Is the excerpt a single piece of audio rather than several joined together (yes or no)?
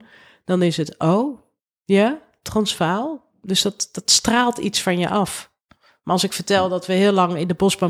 yes